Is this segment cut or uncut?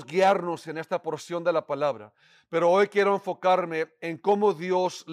uncut